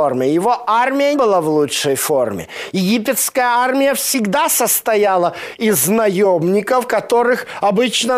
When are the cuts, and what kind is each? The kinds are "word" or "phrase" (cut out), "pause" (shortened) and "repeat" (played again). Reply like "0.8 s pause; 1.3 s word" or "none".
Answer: 1.1 s word